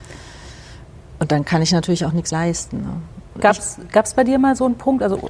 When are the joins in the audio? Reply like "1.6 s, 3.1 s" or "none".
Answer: 2.3 s